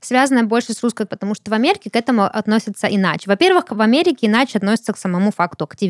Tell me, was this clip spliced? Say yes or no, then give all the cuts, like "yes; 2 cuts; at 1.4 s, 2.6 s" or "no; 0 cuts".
yes; 1 cut; at 1.1 s